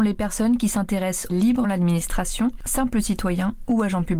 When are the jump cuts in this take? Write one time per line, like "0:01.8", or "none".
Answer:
0:01.3
0:01.6